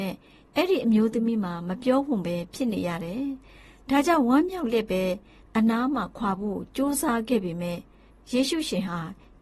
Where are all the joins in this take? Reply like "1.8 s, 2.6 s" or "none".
none